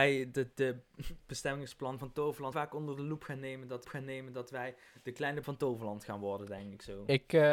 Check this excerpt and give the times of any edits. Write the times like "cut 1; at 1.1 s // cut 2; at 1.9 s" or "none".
cut 1; at 1.2 s // cut 2; at 2.5 s // cut 3; at 3.8 s // cut 4; at 5.4 s